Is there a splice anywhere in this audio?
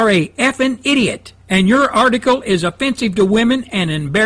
yes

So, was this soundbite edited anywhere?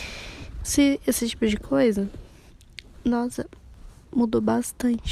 no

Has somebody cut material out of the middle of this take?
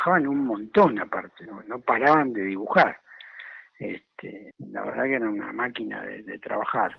no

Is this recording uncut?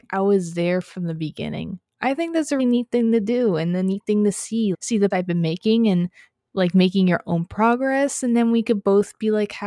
no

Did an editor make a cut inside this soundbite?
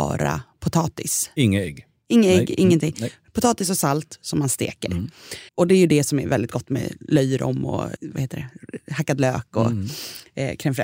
yes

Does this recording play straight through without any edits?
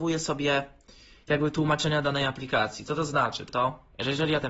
no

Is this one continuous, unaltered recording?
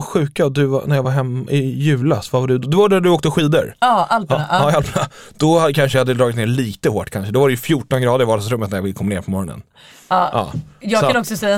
yes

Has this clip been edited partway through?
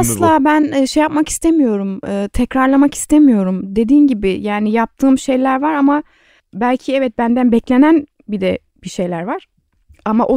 no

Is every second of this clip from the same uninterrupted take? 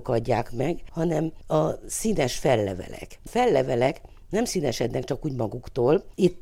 no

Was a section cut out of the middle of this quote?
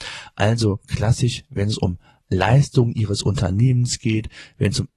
no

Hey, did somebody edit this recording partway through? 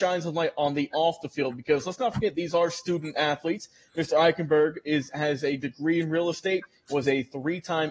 no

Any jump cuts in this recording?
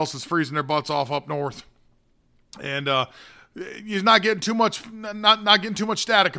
no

